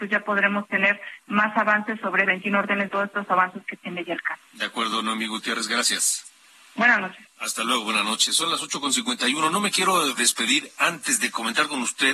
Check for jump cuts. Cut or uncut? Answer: cut